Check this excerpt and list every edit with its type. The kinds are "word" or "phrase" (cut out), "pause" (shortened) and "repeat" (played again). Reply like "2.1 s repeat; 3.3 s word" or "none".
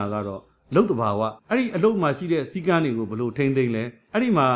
1.4 s pause

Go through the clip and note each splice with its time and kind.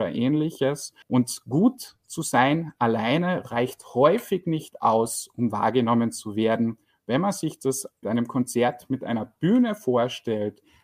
1.0 s pause; 8.0 s phrase

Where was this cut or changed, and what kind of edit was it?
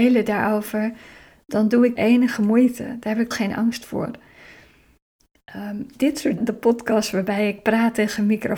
2.0 s phrase; 3.3 s word; 6.4 s word

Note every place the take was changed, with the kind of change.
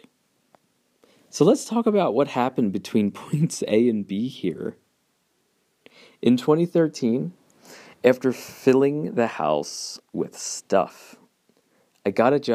none

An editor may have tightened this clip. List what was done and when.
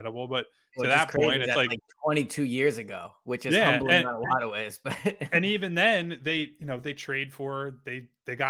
none

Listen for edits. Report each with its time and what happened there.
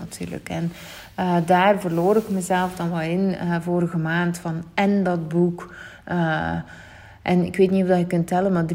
none

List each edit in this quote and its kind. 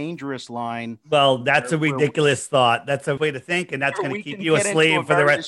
3.2 s word

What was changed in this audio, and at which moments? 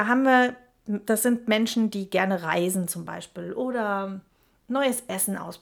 none

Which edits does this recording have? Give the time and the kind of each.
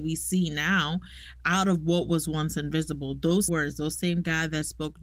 3.5 s word

